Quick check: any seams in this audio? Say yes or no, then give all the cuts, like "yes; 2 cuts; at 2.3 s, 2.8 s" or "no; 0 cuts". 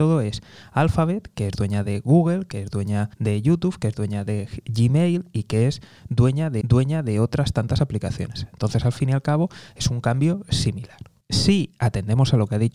yes; 3 cuts; at 3.1 s, 6.6 s, 11.2 s